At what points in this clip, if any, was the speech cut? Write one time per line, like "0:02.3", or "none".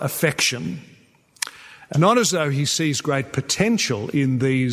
0:01.9